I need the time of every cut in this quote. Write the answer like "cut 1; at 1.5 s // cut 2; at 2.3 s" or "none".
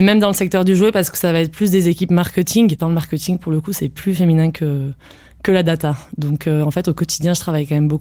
none